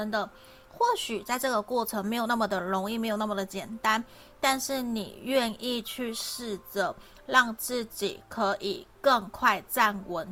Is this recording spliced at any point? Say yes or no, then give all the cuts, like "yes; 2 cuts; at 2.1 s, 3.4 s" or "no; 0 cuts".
no; 0 cuts